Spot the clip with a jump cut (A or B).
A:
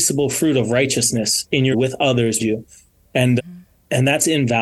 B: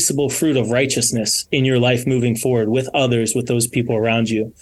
A